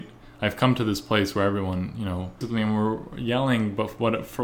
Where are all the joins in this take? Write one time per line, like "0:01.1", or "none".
0:02.4